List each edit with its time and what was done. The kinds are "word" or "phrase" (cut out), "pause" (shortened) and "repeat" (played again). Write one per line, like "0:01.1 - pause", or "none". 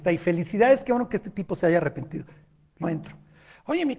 0:02.8 - word